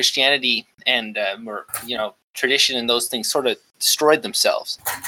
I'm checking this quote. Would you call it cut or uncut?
uncut